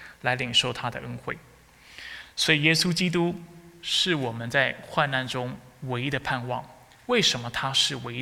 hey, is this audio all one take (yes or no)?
yes